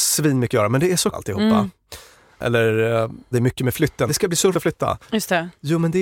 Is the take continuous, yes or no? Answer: no